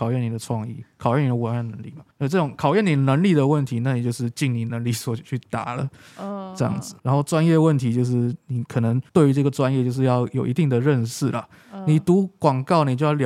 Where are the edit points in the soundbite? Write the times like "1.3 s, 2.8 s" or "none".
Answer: 2.1 s, 7.0 s, 9.1 s